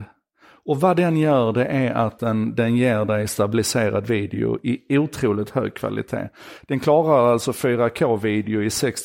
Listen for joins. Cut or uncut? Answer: uncut